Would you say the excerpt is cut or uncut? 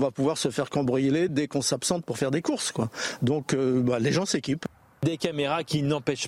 uncut